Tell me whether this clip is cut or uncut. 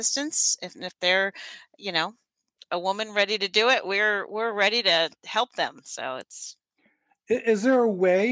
uncut